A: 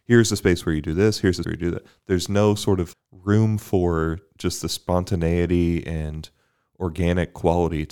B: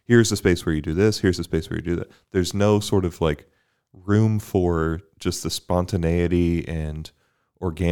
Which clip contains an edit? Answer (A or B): A